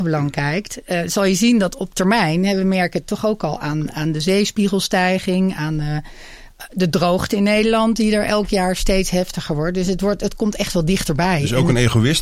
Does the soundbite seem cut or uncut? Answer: uncut